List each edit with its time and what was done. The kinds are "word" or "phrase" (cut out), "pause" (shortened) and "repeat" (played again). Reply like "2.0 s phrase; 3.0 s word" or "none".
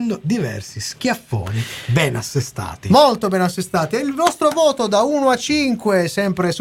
none